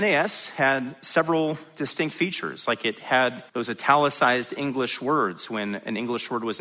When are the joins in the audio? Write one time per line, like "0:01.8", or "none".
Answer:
0:03.5